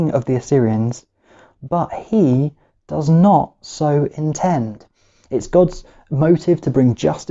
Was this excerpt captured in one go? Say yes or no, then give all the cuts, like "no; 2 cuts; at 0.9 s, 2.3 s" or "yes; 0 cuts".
yes; 0 cuts